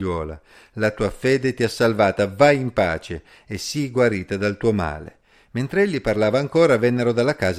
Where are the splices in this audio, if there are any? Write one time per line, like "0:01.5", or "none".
none